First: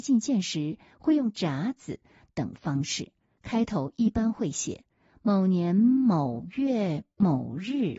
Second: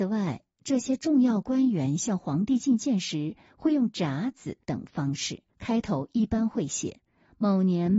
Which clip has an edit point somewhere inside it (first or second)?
second